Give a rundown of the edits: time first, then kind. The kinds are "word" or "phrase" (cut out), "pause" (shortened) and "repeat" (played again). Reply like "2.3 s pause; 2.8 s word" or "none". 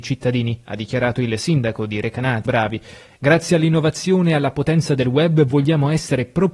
2.5 s word